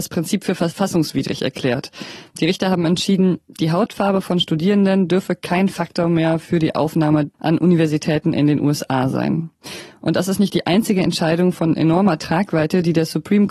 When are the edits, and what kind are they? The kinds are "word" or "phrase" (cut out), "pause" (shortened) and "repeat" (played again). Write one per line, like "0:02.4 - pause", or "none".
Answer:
none